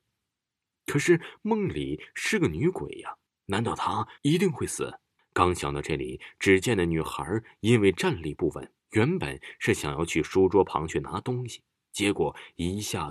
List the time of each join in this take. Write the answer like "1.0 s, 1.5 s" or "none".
3.3 s, 4.2 s, 5.2 s, 8.8 s